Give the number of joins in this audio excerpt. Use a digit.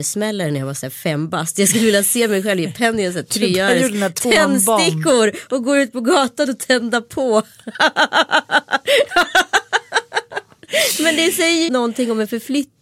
1